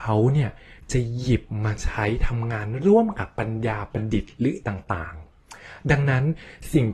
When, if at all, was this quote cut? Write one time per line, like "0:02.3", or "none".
0:04.6